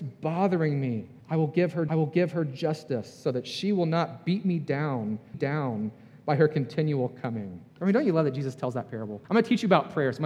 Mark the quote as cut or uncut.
cut